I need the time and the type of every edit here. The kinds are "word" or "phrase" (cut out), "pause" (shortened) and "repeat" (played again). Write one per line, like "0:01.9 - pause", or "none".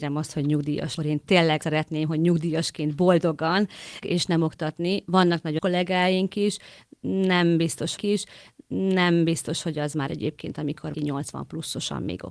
0:01.0 - phrase
0:01.6 - word
0:04.0 - phrase
0:05.6 - word
0:08.0 - repeat
0:10.1 - word
0:10.9 - word